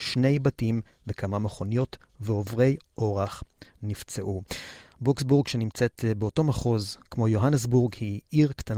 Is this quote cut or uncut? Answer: uncut